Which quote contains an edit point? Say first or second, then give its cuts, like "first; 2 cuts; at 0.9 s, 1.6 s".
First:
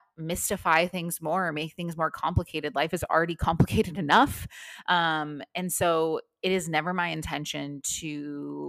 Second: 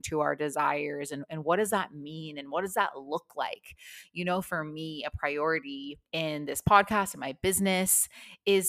second; 1 cut; at 6.1 s